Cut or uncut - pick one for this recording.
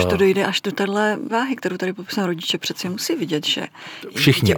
cut